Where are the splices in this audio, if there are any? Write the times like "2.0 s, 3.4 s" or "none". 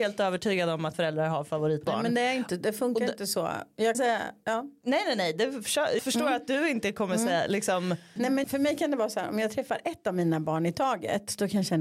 0.9 s, 3.9 s, 6.0 s, 8.4 s